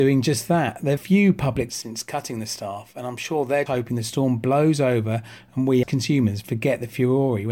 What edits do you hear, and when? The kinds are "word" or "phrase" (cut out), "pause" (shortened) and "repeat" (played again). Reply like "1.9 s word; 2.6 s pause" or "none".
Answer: 1.0 s word; 1.7 s word; 3.7 s word; 5.8 s word

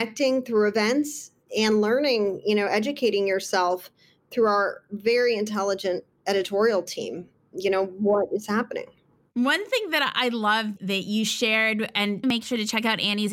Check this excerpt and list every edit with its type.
12.2 s word

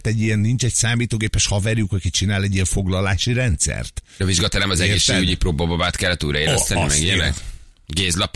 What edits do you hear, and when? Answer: none

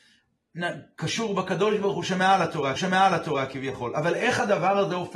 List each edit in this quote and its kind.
2.8 s repeat

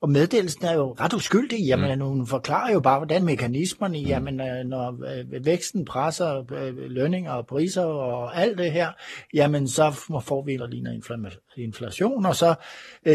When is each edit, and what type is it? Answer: 1.0 s word; 3.2 s word; 10.6 s word

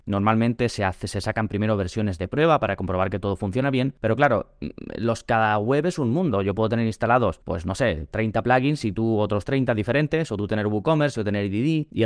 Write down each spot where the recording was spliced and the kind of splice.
none

